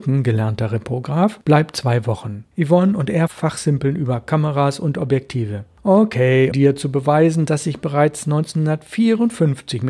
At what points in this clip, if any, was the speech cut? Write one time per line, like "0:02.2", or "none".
0:02.5
0:06.5